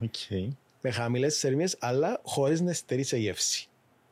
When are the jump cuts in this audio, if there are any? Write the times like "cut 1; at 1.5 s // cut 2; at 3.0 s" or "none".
none